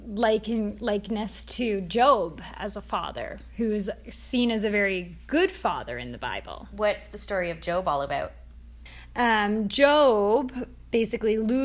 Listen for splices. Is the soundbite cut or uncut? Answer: uncut